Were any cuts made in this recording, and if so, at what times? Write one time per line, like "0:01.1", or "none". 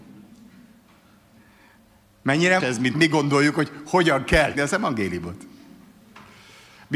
0:02.6
0:02.9
0:04.5